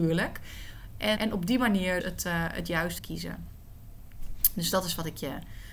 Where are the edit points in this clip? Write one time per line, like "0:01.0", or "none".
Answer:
0:01.2
0:02.0
0:03.0